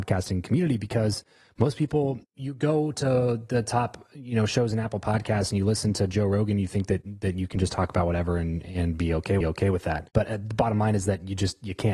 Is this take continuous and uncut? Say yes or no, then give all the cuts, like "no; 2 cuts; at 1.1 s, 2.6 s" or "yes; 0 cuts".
no; 2 cuts; at 2.2 s, 9.4 s